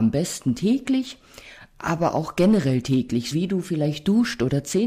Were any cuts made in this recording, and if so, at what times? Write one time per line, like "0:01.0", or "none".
0:03.3